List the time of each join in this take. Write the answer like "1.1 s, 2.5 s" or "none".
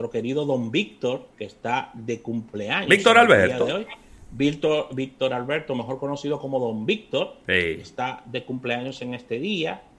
1.3 s